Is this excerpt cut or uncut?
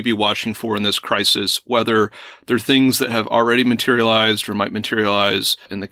uncut